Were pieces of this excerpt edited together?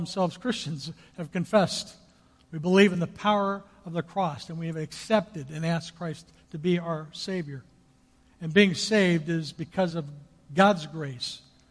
no; 0 cuts

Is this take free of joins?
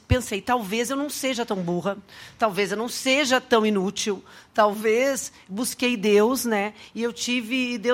yes; 0 cuts

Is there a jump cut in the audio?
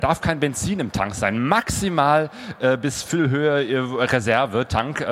no; 0 cuts

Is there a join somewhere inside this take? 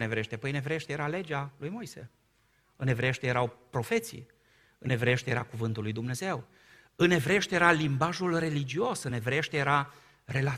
no; 0 cuts

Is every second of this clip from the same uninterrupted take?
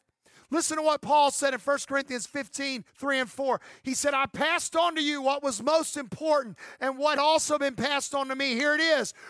no; 2 cuts; at 2.9 s, 7.2 s

